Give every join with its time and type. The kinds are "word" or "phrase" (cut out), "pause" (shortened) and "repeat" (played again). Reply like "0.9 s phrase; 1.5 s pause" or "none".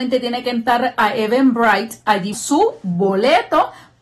0.9 s word; 2.3 s word